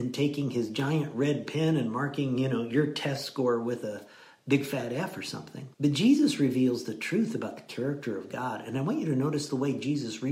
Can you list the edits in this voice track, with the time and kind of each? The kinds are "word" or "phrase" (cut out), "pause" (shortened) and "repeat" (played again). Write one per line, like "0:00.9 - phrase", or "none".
0:05.7 - pause